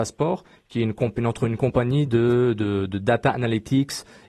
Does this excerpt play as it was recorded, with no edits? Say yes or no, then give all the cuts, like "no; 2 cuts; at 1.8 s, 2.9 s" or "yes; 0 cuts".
yes; 0 cuts